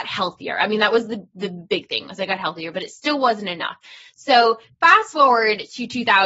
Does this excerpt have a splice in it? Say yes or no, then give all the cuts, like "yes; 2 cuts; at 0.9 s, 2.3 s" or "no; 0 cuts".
no; 0 cuts